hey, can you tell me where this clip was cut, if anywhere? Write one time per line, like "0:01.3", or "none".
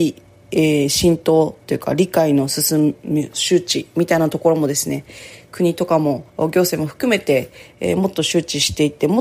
0:06.3